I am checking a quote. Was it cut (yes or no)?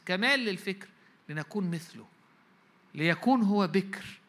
no